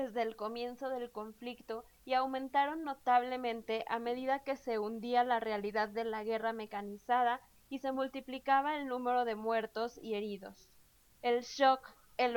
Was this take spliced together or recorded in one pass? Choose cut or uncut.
uncut